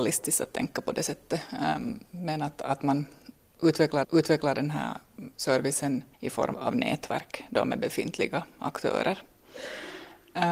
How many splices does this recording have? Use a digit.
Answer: 3